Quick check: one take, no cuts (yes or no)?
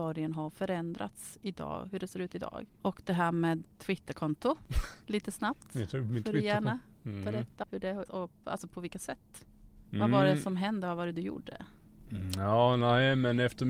no